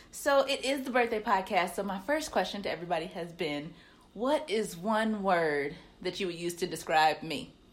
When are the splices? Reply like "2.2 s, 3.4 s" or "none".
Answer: none